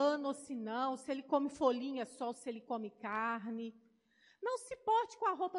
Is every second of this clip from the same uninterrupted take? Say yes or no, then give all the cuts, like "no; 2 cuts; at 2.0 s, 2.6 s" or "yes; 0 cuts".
yes; 0 cuts